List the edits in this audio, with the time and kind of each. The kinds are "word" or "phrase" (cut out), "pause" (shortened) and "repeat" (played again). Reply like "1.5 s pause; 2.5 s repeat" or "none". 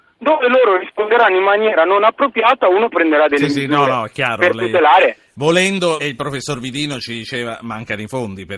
6.0 s word